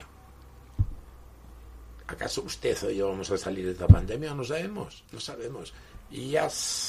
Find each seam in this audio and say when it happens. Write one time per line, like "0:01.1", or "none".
0:05.1

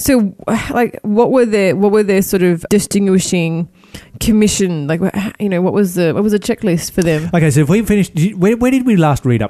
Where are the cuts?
0:02.7

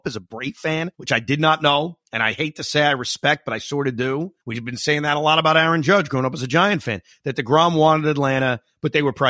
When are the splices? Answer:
0:00.9
0:02.0
0:04.4

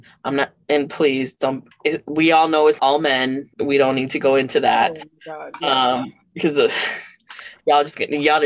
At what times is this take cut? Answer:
0:01.7
0:02.8
0:03.5

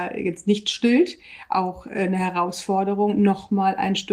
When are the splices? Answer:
none

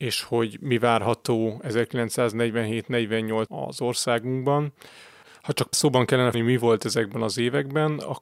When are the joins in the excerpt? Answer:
0:03.5
0:05.7
0:06.3

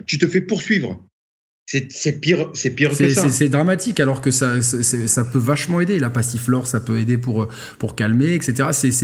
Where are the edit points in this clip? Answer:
none

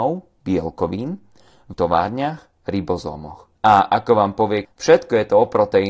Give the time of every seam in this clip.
0:01.7
0:03.6
0:04.6

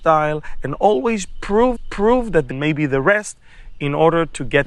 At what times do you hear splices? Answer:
0:01.8
0:02.5

